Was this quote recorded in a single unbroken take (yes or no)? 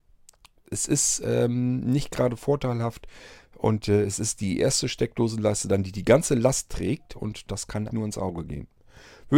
no